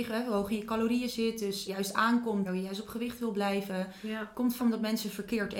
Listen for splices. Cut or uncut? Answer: cut